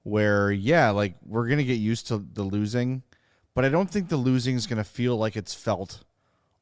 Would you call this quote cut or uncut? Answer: uncut